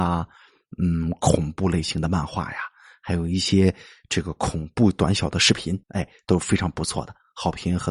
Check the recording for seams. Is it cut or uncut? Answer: cut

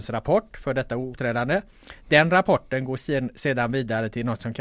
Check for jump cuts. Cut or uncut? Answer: cut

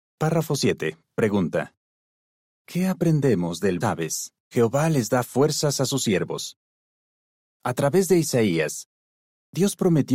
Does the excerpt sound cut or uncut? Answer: cut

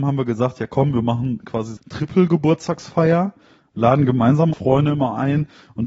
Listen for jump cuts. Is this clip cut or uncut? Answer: cut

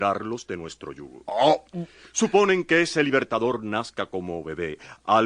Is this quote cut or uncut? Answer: uncut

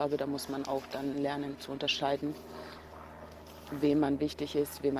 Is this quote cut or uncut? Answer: uncut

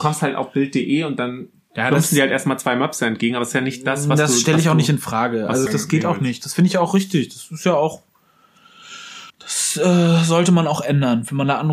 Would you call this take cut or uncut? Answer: cut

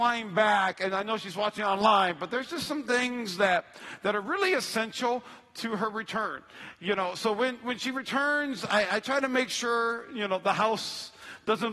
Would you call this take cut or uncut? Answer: uncut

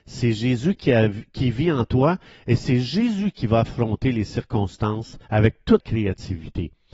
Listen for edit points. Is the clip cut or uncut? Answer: cut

